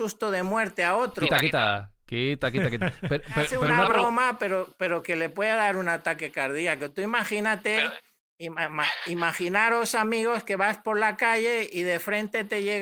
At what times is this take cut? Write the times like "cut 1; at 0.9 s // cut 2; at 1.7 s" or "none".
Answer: none